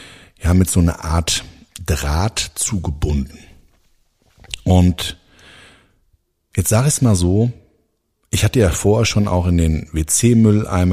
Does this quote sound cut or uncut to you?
uncut